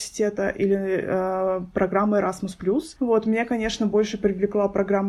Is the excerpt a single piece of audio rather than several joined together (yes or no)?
yes